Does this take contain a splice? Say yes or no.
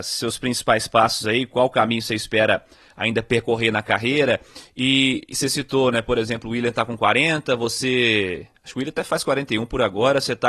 no